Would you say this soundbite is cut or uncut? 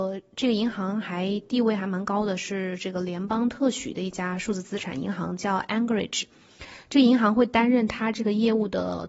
uncut